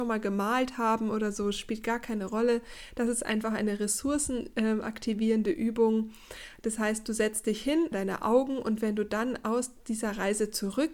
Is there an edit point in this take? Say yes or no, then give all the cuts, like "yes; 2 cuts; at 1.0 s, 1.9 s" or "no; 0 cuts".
yes; 1 cut; at 7.9 s